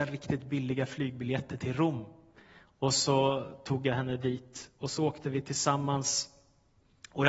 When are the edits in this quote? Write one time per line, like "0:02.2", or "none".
none